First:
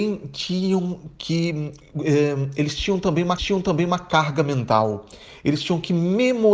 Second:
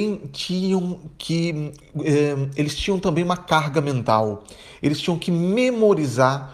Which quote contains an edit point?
first; 1 cut; at 3.4 s

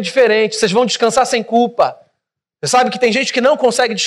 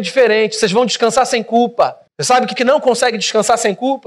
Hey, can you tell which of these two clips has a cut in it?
second; 2 cuts; at 2.1 s, 2.6 s

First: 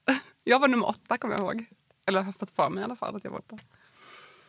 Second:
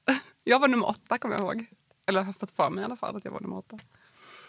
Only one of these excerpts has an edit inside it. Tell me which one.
first; 1 cut; at 3.4 s

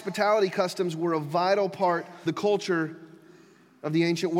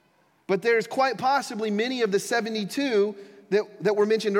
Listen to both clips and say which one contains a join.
first; 1 cut; at 2.3 s

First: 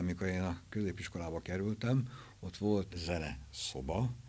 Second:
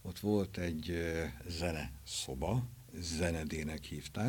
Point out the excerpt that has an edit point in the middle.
first; 1 cut; at 2.9 s

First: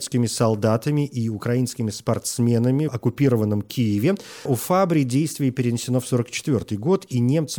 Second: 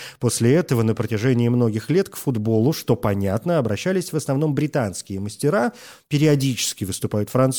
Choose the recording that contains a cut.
first; 2 cuts; at 2.9 s, 4.5 s

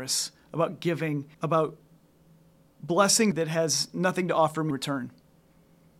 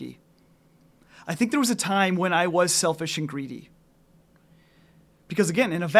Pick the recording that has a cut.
first; 3 cuts; at 1.3 s, 3.3 s, 4.7 s

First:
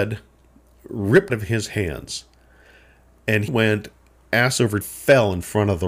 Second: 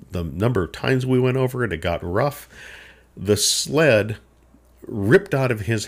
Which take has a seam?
first; 3 cuts; at 1.3 s, 3.5 s, 4.8 s

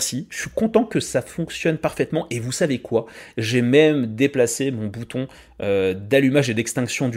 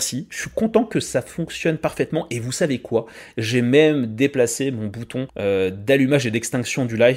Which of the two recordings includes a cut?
second; 1 cut; at 5.3 s

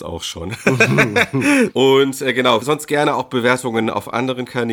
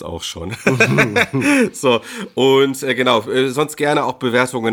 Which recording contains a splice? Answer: first; 2 cuts; at 1.7 s, 2.6 s

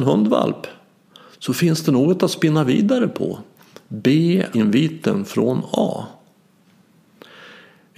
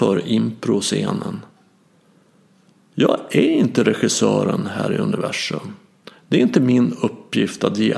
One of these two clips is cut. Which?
first; 1 cut; at 4.5 s

